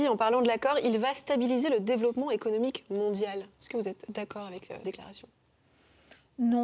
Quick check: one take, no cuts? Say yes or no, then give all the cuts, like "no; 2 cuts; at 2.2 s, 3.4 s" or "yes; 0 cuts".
no; 1 cut; at 4.8 s